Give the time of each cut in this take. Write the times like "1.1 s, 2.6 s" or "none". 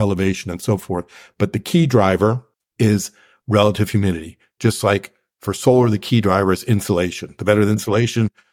2.5 s